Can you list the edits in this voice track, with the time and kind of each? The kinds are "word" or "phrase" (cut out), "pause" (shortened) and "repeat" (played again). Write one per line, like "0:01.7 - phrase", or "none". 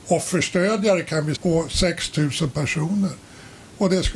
0:01.3 - word